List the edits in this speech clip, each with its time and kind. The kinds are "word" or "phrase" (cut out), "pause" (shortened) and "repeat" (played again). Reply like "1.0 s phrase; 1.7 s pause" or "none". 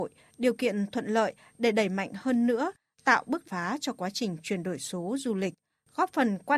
3.4 s word